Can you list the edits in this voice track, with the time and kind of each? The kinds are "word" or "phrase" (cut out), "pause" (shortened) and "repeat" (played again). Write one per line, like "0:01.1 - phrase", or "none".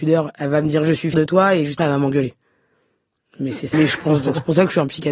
0:01.1 - word
0:01.8 - word
0:03.7 - word